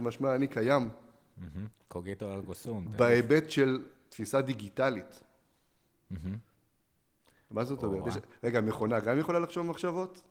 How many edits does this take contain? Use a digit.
0